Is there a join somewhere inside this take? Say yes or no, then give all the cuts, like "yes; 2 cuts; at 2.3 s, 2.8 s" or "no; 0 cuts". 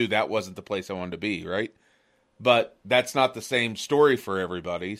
no; 0 cuts